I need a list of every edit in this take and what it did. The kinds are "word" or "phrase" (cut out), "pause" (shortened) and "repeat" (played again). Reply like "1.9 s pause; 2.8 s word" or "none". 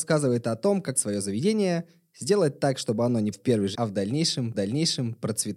0.9 s word; 3.3 s word; 3.7 s word; 4.5 s repeat

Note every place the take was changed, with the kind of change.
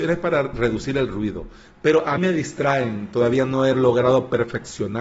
2.2 s word

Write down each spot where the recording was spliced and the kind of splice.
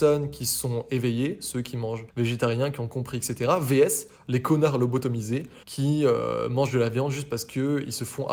2.1 s pause; 5.6 s pause

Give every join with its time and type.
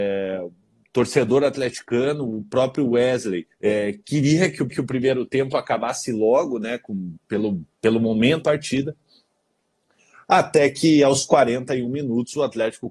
3.5 s pause; 4.7 s repeat; 7.7 s pause; 8.4 s phrase

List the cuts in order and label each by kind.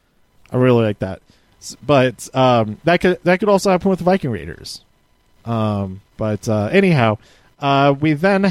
6.1 s pause

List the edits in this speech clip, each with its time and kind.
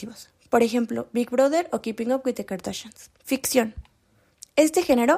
3.2 s pause

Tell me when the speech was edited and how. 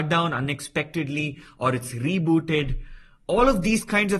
none

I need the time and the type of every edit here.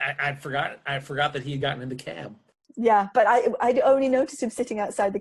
none

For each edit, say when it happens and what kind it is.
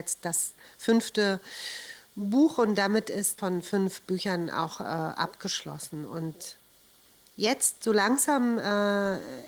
3.4 s phrase; 7.1 s pause

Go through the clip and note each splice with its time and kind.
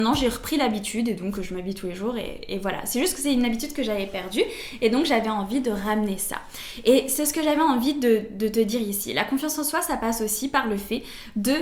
none

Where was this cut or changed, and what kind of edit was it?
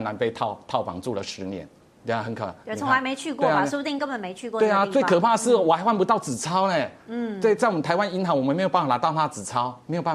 1.8 s pause

